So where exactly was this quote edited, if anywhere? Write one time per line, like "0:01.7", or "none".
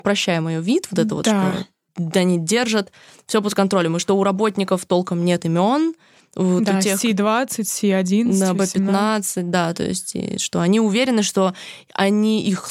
none